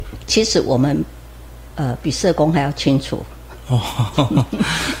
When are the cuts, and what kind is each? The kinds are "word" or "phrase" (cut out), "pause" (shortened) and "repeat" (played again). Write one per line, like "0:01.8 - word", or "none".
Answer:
none